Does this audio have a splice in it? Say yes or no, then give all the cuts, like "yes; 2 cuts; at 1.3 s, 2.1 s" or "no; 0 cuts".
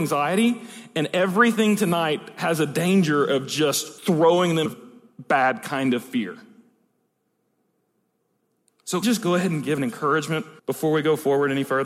yes; 5 cuts; at 4.0 s, 4.7 s, 9.0 s, 9.8 s, 10.6 s